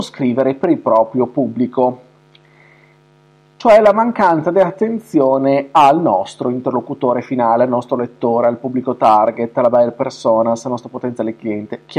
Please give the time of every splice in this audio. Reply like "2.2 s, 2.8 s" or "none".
none